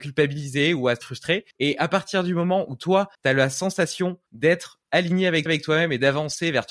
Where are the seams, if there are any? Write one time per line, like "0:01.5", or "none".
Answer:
0:01.0
0:01.5
0:03.1
0:04.3
0:05.5